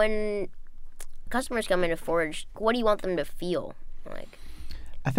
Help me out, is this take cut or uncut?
cut